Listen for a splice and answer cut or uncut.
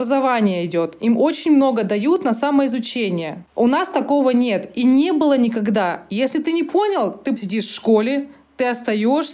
cut